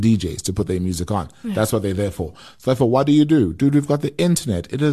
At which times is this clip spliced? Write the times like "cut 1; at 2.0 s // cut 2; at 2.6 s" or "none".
none